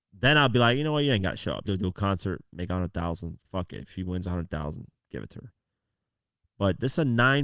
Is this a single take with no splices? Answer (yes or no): no